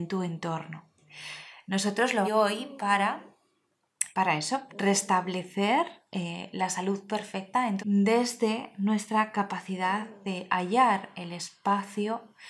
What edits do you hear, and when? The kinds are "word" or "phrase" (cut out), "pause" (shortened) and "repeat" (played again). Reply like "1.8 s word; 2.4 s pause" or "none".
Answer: 2.2 s phrase; 4.1 s word; 4.7 s word; 6.1 s pause; 7.1 s phrase; 7.8 s phrase